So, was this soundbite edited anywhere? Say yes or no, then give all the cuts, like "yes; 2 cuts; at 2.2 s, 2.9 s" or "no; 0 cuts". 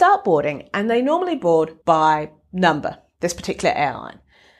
yes; 1 cut; at 1.8 s